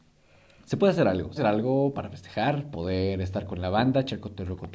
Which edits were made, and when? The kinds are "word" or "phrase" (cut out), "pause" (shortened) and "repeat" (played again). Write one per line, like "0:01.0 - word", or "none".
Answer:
0:01.4 - word
0:02.7 - phrase